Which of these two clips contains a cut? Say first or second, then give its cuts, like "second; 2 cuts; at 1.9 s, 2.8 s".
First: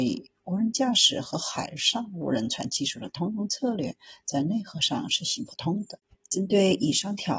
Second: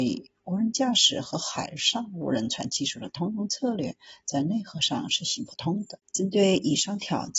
second; 1 cut; at 6.1 s